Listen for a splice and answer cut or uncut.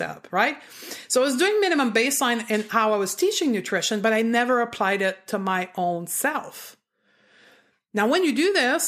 uncut